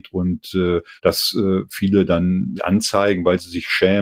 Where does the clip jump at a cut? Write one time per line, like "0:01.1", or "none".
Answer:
0:01.0
0:02.6

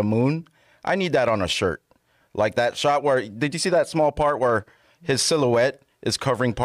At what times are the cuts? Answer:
none

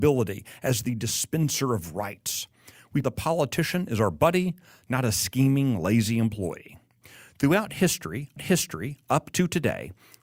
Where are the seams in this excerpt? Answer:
0:03.0
0:08.4

